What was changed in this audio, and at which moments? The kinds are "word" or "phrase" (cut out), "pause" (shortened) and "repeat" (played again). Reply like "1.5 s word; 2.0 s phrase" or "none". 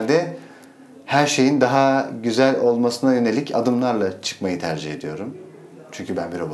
none